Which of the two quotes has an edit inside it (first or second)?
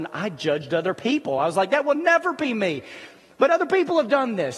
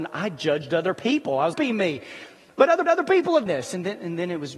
second